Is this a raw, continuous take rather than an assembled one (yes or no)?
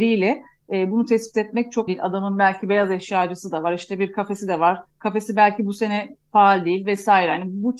no